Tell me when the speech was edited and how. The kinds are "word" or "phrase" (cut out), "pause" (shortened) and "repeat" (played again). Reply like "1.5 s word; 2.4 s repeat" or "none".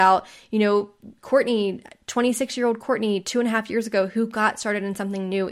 1.2 s pause